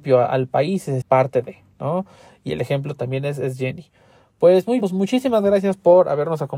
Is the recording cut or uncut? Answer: cut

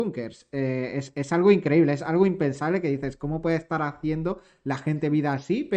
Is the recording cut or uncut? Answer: uncut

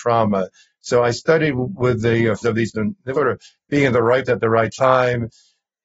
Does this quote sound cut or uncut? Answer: cut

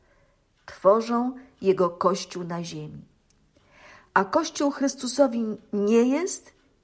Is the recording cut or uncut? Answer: uncut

